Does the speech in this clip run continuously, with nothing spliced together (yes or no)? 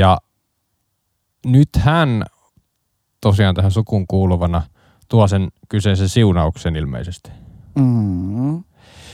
yes